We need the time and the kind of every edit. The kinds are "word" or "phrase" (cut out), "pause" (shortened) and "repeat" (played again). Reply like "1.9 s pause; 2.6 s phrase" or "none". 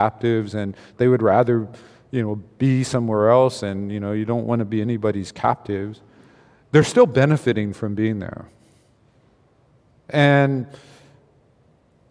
none